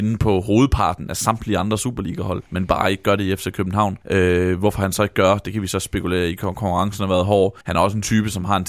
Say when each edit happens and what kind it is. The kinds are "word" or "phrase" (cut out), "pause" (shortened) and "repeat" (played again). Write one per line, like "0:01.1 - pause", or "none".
0:02.5 - pause
0:04.0 - pause
0:07.6 - pause